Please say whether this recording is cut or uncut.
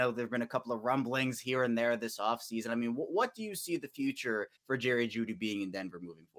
cut